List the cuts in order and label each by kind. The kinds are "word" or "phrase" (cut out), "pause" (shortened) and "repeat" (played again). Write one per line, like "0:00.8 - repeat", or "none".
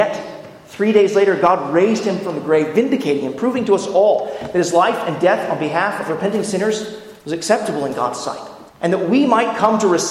0:07.2 - pause
0:08.7 - pause